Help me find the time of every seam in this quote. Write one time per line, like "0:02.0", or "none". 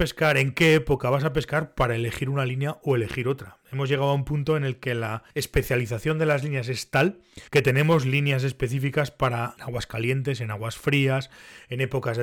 0:05.3
0:07.5
0:09.6